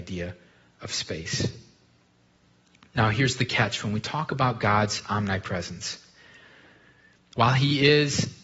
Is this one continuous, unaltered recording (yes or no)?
yes